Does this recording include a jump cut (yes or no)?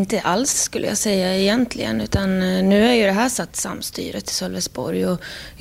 yes